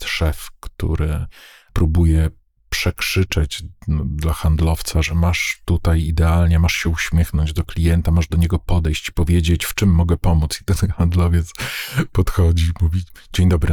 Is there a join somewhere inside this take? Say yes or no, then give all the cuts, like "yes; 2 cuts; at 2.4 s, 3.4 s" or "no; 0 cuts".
no; 0 cuts